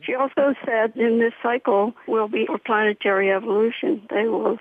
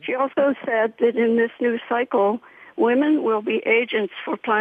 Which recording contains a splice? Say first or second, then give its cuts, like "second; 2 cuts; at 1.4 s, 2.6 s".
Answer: first; 4 cuts; at 0.9 s, 1.4 s, 2.1 s, 2.5 s